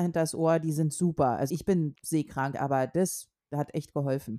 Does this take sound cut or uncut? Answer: cut